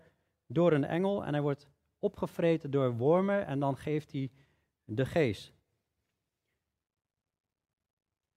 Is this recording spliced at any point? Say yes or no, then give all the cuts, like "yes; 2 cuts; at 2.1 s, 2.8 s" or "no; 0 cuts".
no; 0 cuts